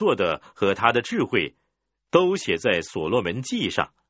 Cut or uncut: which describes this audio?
uncut